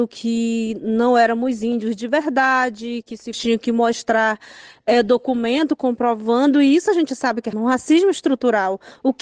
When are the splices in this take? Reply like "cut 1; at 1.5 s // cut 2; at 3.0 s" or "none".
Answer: cut 1; at 3.3 s // cut 2; at 7.5 s